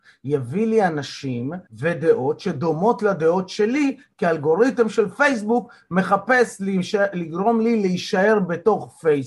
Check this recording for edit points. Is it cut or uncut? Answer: cut